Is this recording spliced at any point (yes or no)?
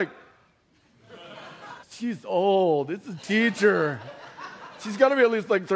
yes